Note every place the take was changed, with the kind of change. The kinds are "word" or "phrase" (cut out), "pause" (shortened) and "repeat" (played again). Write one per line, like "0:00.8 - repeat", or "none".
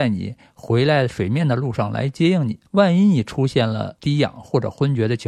0:02.7 - pause
0:04.0 - pause